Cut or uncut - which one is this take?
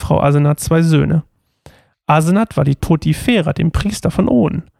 cut